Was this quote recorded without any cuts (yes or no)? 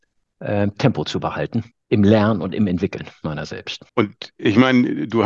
no